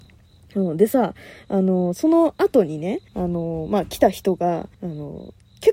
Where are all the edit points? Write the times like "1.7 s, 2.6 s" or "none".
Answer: 3.1 s, 4.7 s